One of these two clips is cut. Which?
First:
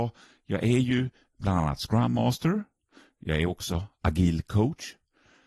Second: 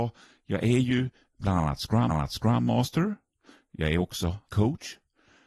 second; 2 cuts; at 2.1 s, 4.5 s

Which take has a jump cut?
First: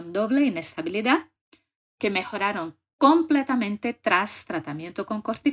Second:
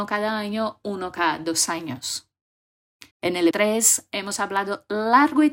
second; 2 cuts; at 3.1 s, 3.5 s

